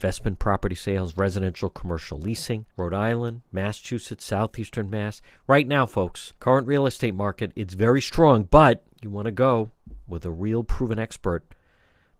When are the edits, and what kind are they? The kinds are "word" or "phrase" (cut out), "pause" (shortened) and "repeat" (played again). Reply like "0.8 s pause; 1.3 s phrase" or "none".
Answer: 2.7 s pause; 6.4 s pause; 8.9 s pause